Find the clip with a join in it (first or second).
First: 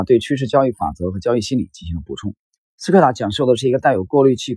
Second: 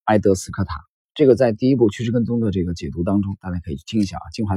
first